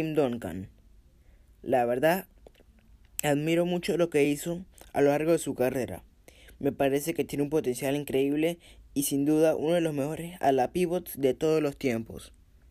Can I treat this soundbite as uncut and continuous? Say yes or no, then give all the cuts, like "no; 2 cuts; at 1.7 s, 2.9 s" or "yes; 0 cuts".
yes; 0 cuts